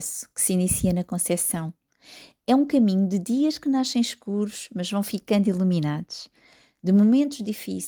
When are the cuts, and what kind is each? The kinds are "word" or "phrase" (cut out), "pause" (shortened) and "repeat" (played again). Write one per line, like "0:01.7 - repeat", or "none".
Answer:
none